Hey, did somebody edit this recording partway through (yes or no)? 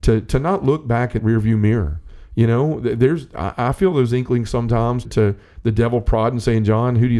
yes